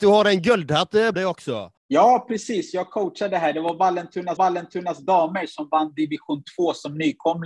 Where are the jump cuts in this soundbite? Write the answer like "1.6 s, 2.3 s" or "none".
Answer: 1.1 s, 1.8 s, 4.4 s